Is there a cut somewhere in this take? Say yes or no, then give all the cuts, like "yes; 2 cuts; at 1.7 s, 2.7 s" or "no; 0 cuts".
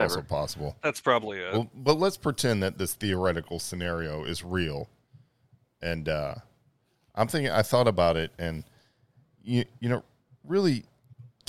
no; 0 cuts